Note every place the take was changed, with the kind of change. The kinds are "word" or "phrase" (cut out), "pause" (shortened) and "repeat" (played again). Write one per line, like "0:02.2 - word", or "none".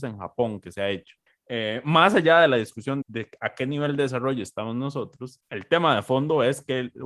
0:01.3 - pause
0:03.0 - word
0:05.4 - word